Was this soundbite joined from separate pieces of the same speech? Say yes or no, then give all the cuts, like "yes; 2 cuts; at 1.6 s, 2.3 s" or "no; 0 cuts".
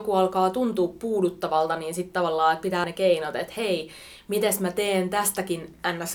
yes; 1 cut; at 2.8 s